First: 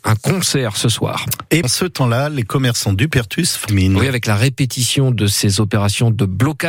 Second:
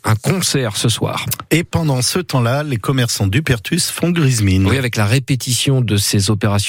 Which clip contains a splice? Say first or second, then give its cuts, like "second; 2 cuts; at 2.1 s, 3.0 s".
first; 2 cuts; at 1.6 s, 3.7 s